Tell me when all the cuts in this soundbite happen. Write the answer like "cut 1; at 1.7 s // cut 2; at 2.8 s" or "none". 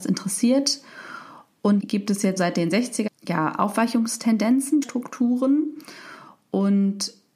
cut 1; at 1.8 s // cut 2; at 2.4 s // cut 3; at 3.1 s // cut 4; at 4.8 s